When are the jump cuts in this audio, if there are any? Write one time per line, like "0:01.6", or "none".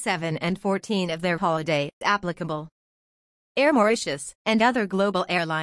0:01.4
0:02.0
0:04.4

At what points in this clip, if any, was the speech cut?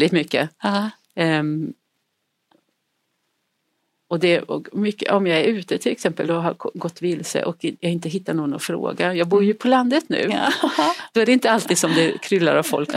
none

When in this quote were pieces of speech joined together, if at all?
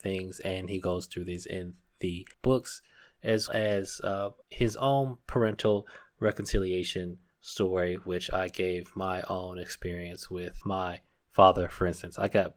0:02.3
0:03.5
0:04.4
0:10.6

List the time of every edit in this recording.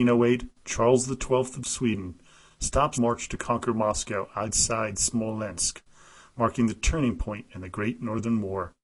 0:02.9

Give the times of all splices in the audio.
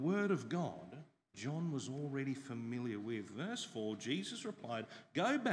0:01.3

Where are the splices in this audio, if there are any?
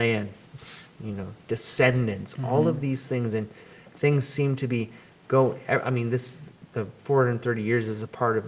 none

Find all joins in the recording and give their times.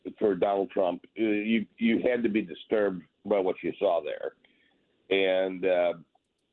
none

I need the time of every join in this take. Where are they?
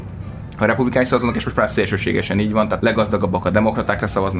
0:02.8

